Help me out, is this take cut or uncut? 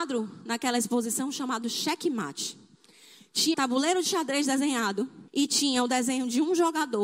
cut